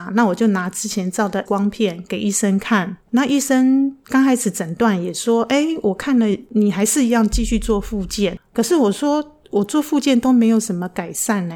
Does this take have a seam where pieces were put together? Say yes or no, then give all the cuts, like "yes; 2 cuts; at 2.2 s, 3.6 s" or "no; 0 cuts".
yes; 2 cuts; at 1.5 s, 3.0 s